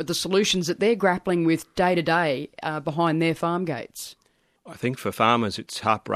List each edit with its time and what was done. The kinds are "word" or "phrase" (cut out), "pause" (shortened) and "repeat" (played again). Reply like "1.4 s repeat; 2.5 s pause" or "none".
none